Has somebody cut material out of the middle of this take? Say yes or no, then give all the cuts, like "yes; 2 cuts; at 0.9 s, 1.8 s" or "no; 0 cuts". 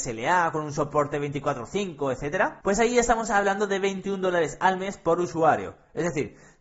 yes; 1 cut; at 2.6 s